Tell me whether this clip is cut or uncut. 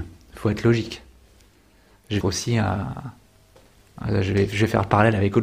cut